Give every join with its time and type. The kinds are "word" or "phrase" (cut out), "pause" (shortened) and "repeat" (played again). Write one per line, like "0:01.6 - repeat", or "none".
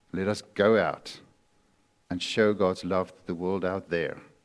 none